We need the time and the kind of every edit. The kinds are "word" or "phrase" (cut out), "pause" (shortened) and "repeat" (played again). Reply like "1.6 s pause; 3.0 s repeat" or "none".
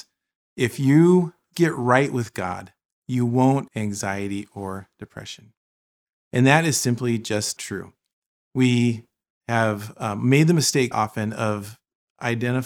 1.5 s word; 3.7 s word; 7.6 s word; 10.9 s word